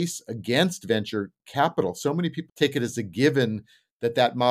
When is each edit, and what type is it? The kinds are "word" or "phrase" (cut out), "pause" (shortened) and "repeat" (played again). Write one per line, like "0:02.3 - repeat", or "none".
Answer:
0:02.5 - word

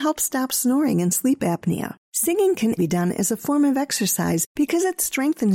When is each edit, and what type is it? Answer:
0:02.0 - pause
0:02.8 - word

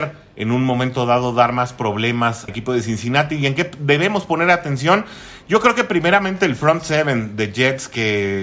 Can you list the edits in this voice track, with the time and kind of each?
0:02.5 - word

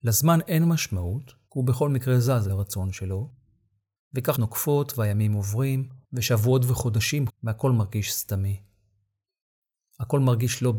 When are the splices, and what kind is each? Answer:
0:01.5 - pause
0:02.5 - word
0:04.3 - word
0:06.0 - pause
0:07.3 - word

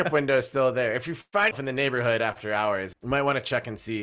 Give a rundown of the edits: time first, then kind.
0:01.5 - word
0:02.9 - word

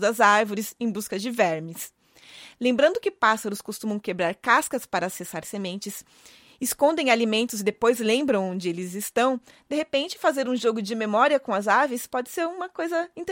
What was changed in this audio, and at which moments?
none

